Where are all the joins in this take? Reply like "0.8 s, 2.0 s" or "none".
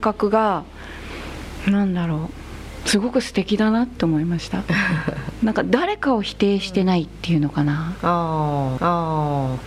8.8 s